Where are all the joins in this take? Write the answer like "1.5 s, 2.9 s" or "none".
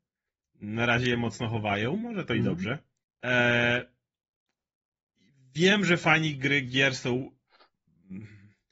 3.0 s